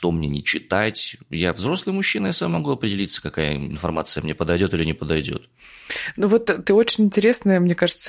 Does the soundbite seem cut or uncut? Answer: uncut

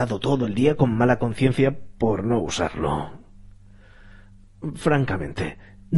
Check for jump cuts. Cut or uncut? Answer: uncut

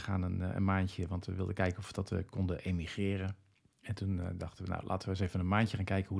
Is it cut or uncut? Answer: uncut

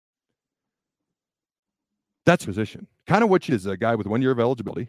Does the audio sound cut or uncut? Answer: cut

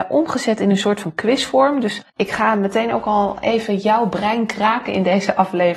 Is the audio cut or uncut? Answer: cut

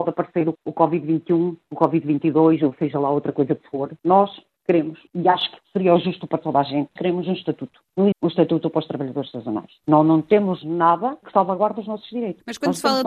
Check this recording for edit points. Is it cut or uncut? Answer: cut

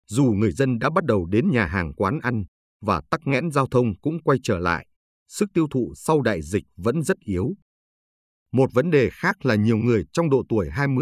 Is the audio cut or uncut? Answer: uncut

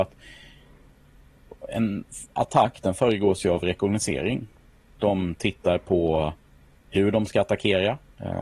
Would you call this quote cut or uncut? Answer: uncut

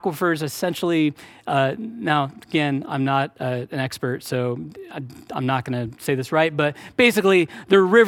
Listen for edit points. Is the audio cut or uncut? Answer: uncut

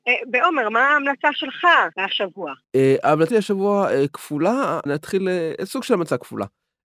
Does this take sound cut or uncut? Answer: cut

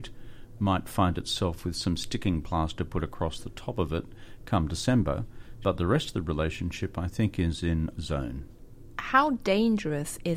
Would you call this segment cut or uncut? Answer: cut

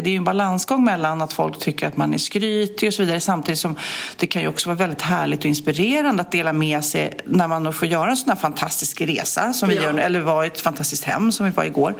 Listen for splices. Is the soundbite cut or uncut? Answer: uncut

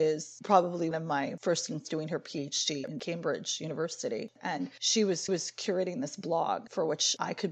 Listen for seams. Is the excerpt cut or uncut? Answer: cut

